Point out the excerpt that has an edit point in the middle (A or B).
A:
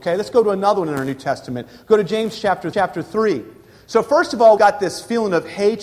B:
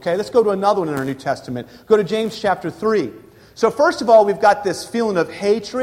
A